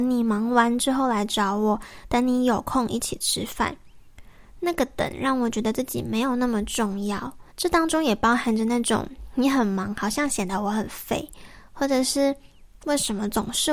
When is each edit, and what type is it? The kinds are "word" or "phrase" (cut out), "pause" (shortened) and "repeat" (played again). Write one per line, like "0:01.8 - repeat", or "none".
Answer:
0:07.5 - pause